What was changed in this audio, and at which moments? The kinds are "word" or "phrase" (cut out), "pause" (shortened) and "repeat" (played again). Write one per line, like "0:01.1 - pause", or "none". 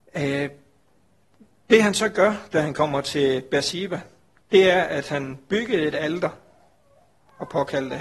none